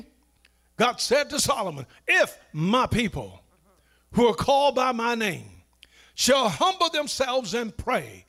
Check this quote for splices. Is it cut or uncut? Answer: uncut